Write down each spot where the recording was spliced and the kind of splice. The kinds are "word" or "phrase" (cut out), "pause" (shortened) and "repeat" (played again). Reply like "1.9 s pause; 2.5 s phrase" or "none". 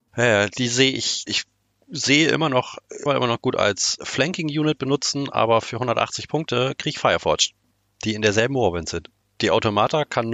1.3 s word; 3.1 s phrase